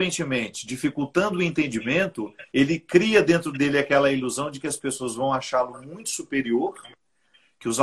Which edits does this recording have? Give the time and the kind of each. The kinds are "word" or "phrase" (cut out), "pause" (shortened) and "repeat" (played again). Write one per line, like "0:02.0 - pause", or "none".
0:02.5 - pause